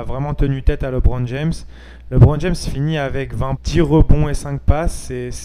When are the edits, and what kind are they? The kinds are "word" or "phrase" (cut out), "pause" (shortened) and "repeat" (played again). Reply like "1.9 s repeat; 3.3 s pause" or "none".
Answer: 3.6 s word